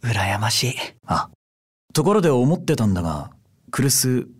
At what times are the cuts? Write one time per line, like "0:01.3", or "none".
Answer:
0:01.0